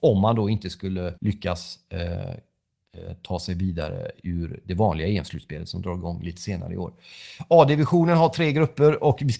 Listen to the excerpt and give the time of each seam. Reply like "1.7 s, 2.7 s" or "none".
1.2 s

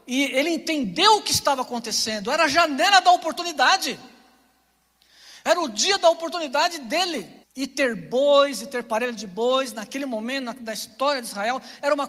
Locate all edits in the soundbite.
7.4 s

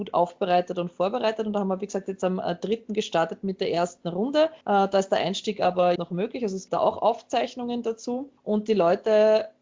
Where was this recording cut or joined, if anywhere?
4.6 s, 6.0 s, 6.7 s, 8.4 s

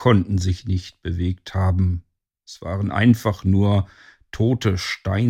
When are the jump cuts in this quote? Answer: none

